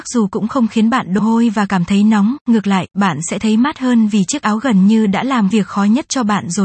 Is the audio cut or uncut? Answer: cut